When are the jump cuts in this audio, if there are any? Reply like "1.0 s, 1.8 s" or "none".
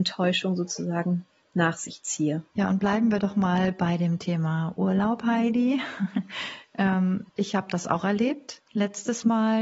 2.5 s, 7.3 s